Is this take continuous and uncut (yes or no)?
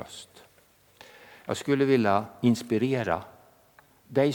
yes